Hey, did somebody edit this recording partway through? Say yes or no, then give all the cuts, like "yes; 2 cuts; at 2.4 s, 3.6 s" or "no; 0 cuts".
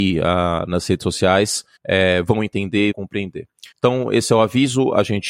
yes; 3 cuts; at 1.8 s, 2.9 s, 3.7 s